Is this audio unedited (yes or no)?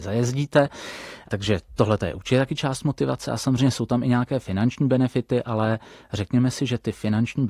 yes